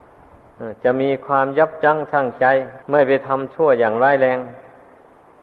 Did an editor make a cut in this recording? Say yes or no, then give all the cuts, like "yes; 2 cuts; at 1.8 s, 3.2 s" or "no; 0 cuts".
yes; 1 cut; at 2.8 s